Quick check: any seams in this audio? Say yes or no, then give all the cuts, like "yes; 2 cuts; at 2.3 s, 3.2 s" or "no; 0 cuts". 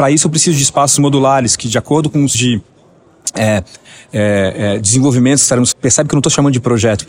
yes; 2 cuts; at 2.3 s, 5.7 s